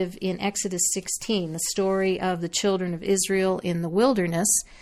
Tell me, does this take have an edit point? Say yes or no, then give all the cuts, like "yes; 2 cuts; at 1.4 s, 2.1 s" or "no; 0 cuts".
no; 0 cuts